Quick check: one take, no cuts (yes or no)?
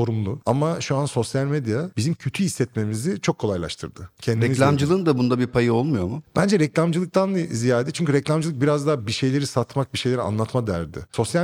yes